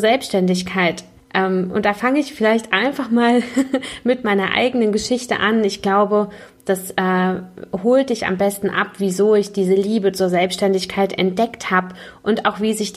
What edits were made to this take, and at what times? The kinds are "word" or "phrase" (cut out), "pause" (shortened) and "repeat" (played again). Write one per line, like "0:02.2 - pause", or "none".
0:01.2 - pause